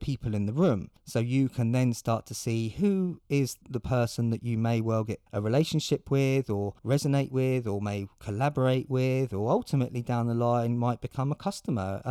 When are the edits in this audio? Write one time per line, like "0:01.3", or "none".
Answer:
0:01.0
0:03.6
0:05.3
0:06.8